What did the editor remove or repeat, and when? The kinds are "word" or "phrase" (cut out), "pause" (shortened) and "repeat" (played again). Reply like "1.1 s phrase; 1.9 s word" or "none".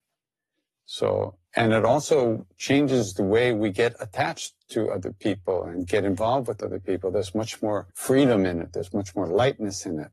1.4 s pause; 7.9 s pause